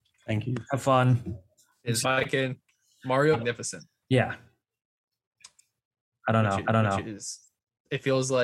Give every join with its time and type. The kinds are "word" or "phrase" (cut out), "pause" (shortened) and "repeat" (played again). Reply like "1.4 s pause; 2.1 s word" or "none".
2.0 s phrase; 3.3 s word; 4.0 s pause; 6.6 s repeat